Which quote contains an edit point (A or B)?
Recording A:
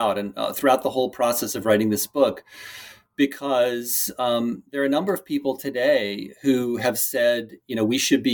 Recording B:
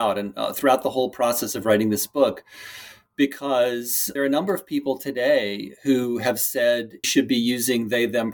B